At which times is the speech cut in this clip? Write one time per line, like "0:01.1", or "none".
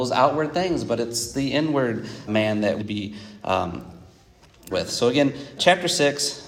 0:02.3
0:02.8
0:04.7
0:05.6